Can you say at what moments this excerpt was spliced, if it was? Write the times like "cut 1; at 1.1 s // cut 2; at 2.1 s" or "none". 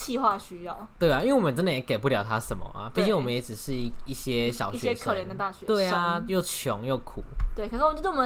none